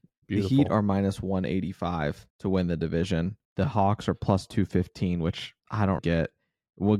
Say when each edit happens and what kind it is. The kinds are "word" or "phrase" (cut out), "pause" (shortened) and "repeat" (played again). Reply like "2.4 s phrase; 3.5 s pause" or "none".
2.3 s pause; 3.4 s pause; 5.6 s pause; 6.0 s word